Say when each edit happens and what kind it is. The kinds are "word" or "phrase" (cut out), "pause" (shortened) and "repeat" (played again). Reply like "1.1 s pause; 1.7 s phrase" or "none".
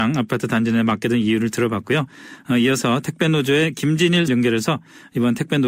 4.3 s word